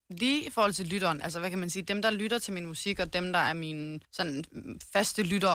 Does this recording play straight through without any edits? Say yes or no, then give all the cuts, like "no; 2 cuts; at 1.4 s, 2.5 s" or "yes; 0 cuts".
no; 1 cut; at 4.0 s